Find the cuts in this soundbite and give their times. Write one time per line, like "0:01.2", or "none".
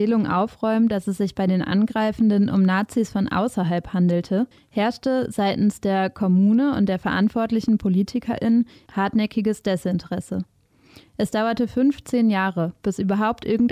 0:04.5